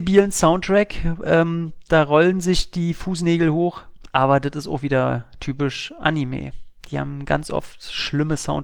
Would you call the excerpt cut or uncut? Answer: uncut